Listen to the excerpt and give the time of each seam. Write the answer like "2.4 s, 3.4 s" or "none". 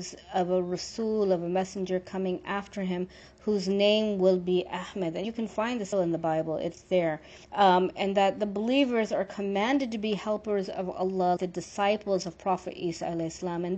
5.2 s, 5.9 s, 7.4 s, 11.4 s